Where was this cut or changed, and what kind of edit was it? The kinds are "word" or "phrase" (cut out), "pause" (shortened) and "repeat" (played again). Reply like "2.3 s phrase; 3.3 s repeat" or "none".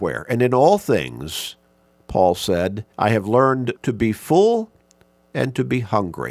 2.9 s pause; 3.8 s word